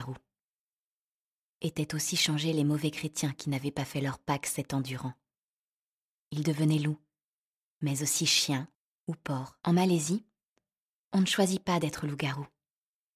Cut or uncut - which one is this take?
cut